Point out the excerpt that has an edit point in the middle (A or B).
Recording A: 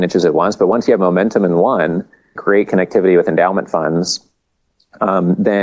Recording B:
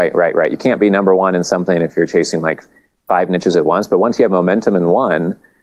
A